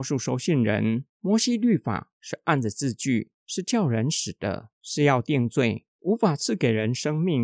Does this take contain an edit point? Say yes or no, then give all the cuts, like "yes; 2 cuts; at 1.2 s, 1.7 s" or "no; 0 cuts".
yes; 3 cuts; at 1.1 s, 3.4 s, 4.7 s